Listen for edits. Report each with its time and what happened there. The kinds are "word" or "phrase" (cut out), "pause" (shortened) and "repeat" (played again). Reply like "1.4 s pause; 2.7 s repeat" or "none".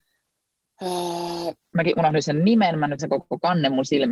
1.6 s pause; 3.0 s word

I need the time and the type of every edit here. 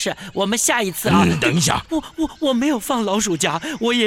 1.9 s word

